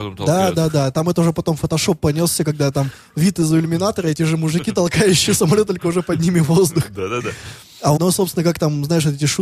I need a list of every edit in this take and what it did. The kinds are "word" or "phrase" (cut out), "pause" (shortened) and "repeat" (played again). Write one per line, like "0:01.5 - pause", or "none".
0:08.0 - word